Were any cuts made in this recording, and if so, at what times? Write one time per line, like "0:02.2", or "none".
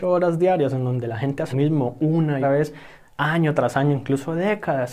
0:01.5
0:02.4